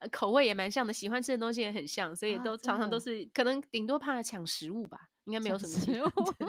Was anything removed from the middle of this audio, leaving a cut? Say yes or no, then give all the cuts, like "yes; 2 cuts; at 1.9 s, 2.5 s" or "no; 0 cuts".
yes; 1 cut; at 3.3 s